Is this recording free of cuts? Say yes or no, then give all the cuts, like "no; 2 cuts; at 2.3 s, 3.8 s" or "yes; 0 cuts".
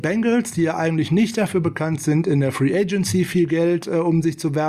yes; 0 cuts